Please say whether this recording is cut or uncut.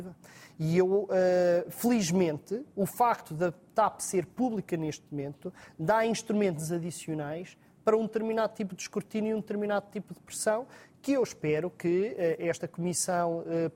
uncut